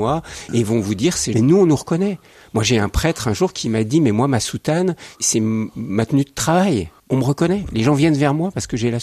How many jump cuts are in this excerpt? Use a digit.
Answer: 2